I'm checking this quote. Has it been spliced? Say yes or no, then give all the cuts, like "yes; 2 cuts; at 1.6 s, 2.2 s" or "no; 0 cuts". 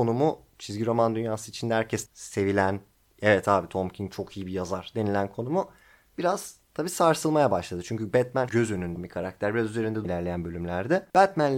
yes; 5 cuts; at 2.1 s, 6.6 s, 8.5 s, 9.0 s, 10.0 s